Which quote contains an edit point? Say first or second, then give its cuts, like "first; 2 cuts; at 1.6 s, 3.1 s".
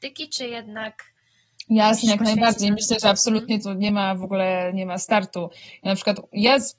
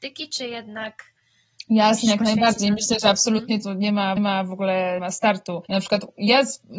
second; 3 cuts; at 4.2 s, 5.0 s, 5.7 s